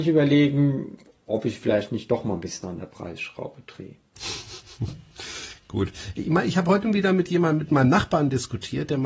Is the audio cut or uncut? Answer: uncut